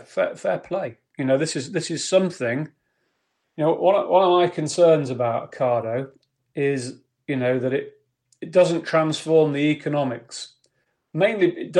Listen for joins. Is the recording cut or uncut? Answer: uncut